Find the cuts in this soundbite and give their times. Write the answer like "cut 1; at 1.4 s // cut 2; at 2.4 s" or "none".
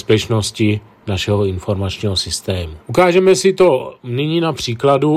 cut 1; at 2.8 s